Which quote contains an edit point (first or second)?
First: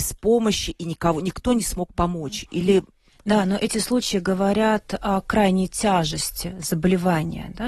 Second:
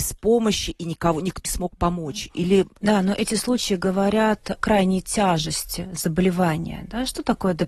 second